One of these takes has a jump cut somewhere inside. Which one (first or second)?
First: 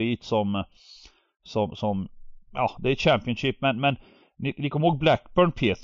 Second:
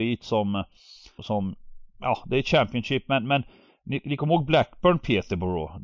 second